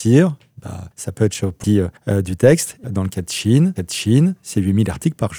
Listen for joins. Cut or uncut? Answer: cut